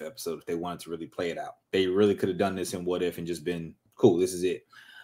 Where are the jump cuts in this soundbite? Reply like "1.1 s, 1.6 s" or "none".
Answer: 1.6 s, 3.9 s